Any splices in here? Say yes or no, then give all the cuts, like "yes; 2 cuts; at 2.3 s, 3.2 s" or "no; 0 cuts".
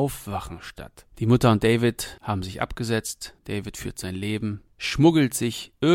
yes; 2 cuts; at 1.1 s, 3.4 s